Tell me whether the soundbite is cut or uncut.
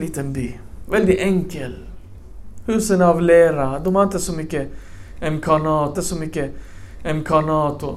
cut